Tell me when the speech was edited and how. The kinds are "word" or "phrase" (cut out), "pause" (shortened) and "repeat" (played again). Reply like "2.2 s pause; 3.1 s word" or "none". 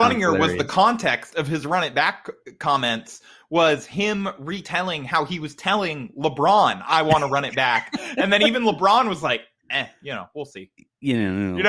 none

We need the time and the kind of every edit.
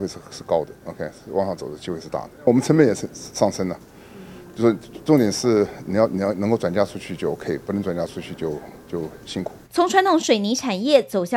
2.3 s pause; 9.6 s pause

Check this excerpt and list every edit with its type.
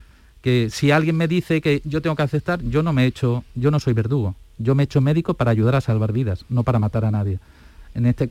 none

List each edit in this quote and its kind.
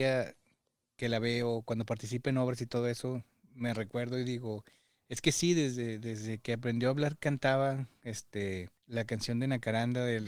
8.8 s pause

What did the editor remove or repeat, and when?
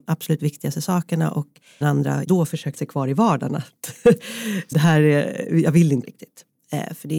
1.8 s word; 2.2 s word; 2.7 s word; 4.7 s word; 6.0 s word

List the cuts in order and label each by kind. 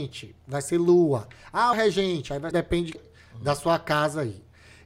1.7 s phrase; 2.5 s word; 2.9 s phrase

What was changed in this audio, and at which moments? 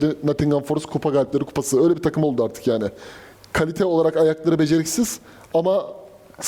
none

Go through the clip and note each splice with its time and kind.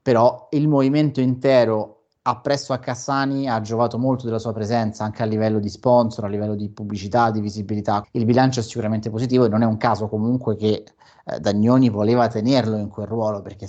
8.0 s word

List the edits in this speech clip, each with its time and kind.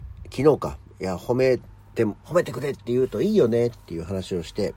2.2 s pause

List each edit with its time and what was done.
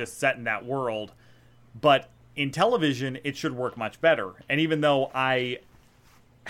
none

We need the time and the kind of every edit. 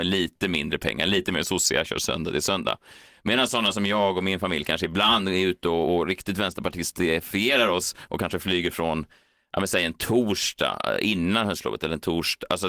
none

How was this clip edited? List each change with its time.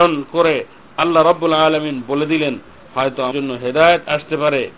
3.3 s phrase

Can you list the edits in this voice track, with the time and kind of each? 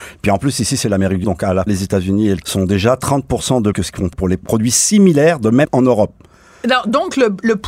1.2 s word; 1.7 s word; 2.4 s word; 3.7 s word; 4.1 s word; 5.6 s word

